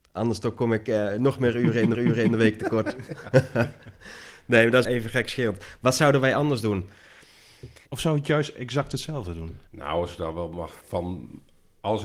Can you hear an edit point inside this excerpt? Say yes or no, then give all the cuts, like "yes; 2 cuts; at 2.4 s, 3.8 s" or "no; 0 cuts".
yes; 5 cuts; at 1.9 s, 4.8 s, 7.9 s, 9.7 s, 10.8 s